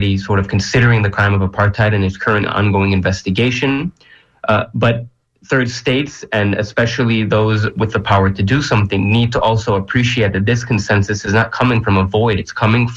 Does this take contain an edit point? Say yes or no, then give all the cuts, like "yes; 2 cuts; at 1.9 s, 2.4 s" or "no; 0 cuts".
no; 0 cuts